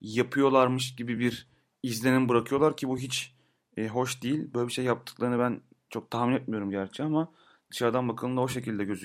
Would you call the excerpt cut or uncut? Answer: uncut